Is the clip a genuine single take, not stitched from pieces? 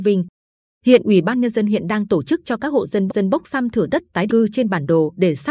no; 2 cuts; at 3.1 s, 4.3 s

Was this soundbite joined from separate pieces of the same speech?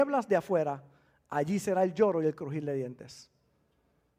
no; 0 cuts

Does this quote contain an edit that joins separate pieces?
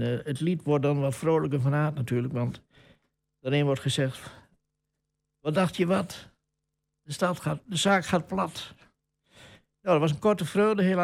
no; 0 cuts

